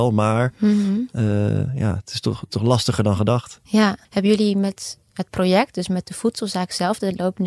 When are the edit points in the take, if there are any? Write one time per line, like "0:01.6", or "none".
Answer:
0:04.0